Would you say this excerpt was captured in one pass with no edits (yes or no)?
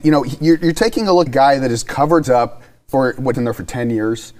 no